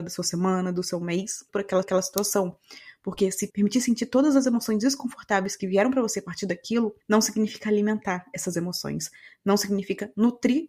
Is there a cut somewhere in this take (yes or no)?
yes